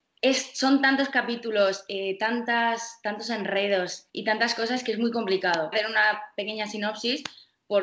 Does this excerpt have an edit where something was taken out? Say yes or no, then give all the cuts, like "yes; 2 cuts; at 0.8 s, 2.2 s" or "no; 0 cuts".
yes; 2 cuts; at 4.1 s, 5.7 s